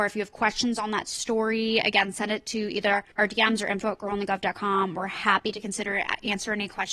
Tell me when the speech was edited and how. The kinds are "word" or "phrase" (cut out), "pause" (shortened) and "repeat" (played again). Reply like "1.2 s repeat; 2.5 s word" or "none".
3.1 s pause